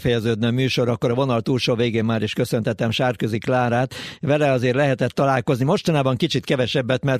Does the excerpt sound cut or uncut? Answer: uncut